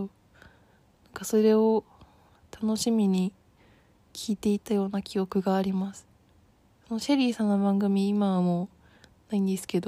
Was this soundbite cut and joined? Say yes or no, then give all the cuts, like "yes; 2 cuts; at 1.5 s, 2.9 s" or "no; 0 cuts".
no; 0 cuts